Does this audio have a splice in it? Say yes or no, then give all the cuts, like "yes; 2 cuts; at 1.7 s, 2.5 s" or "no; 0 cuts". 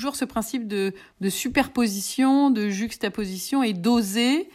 no; 0 cuts